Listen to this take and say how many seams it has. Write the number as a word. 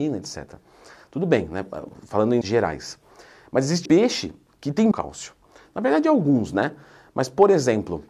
three